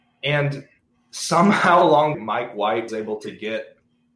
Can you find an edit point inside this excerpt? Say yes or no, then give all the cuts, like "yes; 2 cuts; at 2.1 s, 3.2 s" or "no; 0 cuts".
yes; 2 cuts; at 2.1 s, 2.9 s